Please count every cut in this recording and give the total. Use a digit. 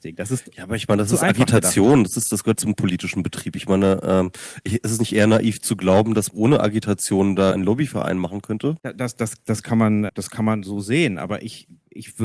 5